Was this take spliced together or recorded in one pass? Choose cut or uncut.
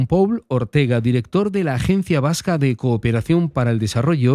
uncut